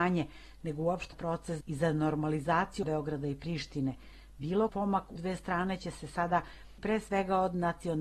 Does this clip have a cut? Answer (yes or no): yes